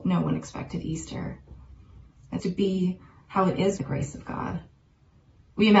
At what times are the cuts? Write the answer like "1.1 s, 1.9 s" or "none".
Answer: 2.4 s, 3.8 s